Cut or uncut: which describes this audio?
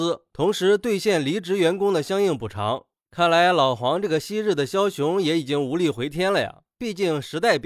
uncut